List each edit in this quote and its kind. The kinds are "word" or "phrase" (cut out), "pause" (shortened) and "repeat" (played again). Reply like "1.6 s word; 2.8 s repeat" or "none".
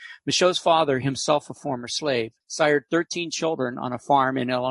2.4 s pause